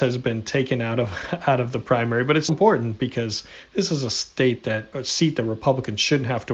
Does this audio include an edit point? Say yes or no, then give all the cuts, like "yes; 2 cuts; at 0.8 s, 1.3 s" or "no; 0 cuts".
yes; 2 cuts; at 2.5 s, 4.9 s